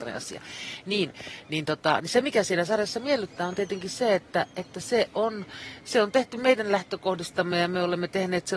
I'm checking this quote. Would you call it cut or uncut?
uncut